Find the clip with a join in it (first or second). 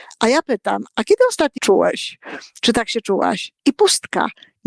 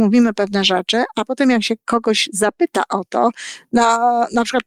first